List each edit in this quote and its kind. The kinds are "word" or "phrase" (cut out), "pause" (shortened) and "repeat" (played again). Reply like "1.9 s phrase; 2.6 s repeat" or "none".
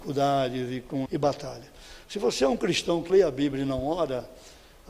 1.1 s phrase; 3.1 s word

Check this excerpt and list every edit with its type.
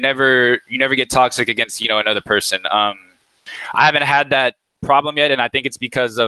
none

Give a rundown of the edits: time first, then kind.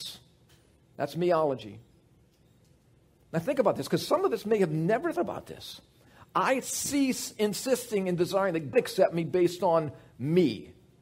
5.2 s word; 8.7 s word

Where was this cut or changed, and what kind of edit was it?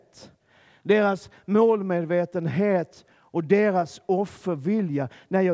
3.1 s pause

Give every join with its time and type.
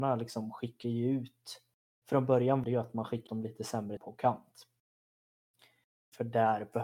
2.6 s word; 3.3 s word; 4.0 s word

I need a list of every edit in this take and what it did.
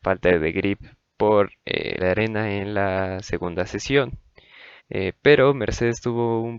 2.0 s phrase; 4.8 s pause

